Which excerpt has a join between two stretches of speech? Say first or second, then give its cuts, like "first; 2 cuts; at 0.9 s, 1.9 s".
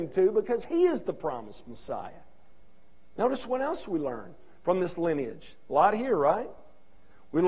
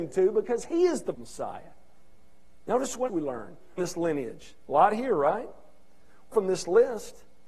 second; 4 cuts; at 1.1 s, 3.1 s, 3.8 s, 6.3 s